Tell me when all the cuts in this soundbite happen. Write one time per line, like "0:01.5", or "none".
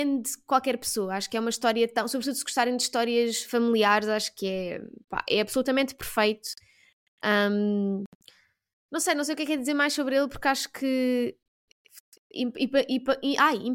none